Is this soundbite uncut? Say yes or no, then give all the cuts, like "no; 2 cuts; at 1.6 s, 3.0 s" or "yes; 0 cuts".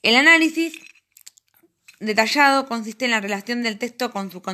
yes; 0 cuts